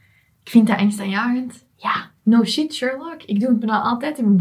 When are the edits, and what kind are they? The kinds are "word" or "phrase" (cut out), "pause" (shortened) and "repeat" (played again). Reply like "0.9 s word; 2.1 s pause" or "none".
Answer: 2.2 s pause